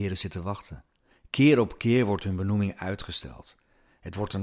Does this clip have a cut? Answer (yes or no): no